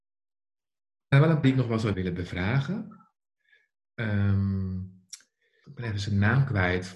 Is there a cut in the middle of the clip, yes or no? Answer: yes